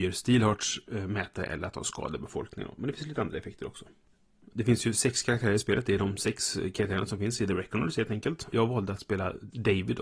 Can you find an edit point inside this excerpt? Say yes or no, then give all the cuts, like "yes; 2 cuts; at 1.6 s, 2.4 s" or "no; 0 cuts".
no; 0 cuts